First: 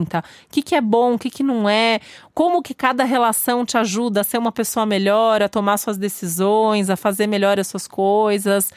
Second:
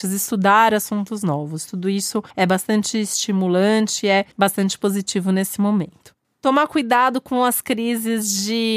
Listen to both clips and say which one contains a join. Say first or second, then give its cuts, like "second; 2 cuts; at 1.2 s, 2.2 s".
second; 3 cuts; at 2.3 s, 4.3 s, 6.2 s